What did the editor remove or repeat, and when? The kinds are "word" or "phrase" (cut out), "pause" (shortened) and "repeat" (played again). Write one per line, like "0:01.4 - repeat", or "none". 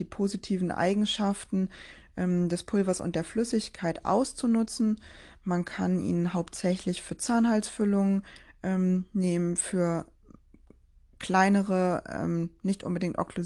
none